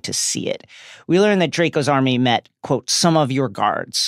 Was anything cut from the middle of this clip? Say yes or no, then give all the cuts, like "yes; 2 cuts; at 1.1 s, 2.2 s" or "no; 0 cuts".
no; 0 cuts